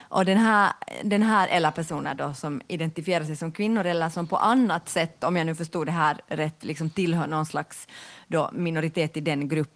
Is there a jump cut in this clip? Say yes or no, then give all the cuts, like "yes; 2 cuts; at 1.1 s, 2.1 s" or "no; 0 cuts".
no; 0 cuts